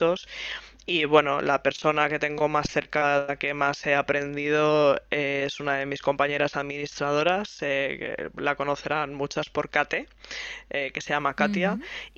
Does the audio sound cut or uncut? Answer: uncut